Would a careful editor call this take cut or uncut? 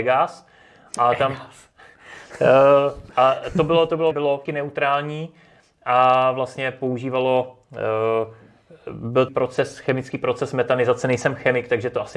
cut